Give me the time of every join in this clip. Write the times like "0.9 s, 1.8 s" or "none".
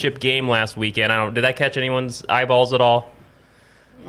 none